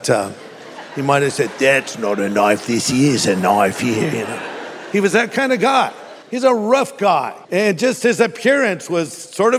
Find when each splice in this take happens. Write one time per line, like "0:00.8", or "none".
0:06.2
0:07.4